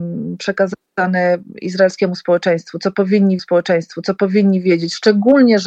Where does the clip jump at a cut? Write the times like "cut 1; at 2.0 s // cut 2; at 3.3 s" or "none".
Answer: cut 1; at 3.4 s